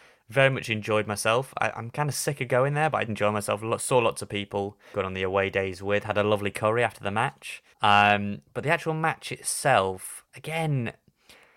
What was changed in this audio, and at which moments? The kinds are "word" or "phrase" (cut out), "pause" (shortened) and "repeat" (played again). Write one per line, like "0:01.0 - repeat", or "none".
0:03.1 - word
0:04.9 - phrase
0:07.7 - pause
0:10.3 - pause